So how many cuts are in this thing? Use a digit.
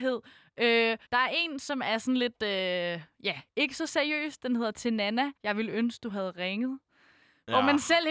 2